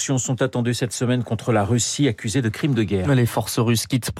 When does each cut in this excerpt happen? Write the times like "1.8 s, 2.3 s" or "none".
none